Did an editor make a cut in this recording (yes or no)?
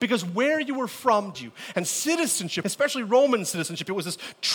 yes